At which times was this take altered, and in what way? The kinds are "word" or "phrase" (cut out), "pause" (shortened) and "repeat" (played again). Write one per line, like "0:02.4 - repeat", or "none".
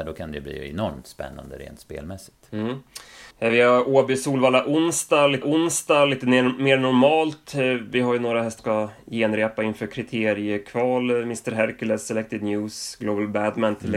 0:03.3 - pause
0:05.4 - repeat
0:08.6 - word